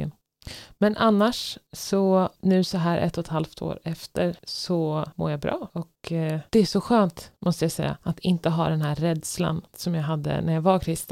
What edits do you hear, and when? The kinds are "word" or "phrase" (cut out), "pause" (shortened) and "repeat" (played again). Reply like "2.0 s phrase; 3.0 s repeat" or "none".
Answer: none